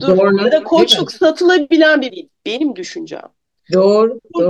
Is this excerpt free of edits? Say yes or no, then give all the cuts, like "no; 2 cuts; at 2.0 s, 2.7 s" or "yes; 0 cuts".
no; 1 cut; at 2.1 s